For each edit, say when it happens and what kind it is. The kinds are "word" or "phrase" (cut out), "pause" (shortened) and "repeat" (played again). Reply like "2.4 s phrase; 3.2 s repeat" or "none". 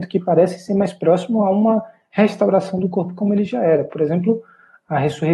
none